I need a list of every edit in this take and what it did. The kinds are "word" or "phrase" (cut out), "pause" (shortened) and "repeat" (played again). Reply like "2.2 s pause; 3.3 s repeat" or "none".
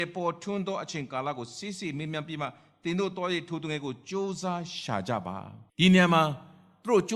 5.7 s pause